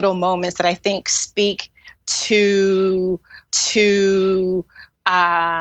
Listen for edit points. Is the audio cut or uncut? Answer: cut